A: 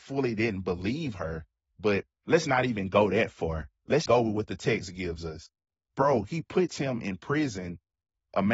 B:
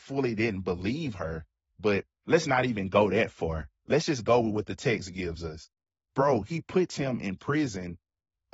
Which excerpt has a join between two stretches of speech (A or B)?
A